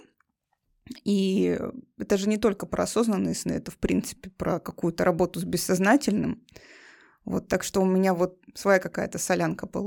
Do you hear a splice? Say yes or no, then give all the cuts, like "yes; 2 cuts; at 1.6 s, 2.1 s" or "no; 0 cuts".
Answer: no; 0 cuts